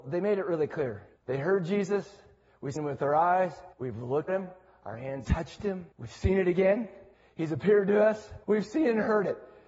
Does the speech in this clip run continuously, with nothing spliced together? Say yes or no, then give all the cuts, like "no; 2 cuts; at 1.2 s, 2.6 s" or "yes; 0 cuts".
no; 8 cuts; at 1.2 s, 2.8 s, 3.7 s, 4.3 s, 5.2 s, 5.9 s, 7.1 s, 8.4 s